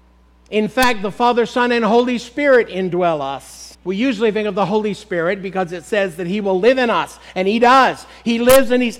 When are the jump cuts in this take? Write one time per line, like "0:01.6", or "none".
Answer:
0:03.7